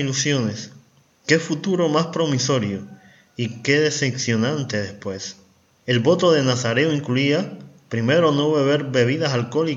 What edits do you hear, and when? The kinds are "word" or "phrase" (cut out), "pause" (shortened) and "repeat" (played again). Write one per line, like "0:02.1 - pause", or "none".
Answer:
none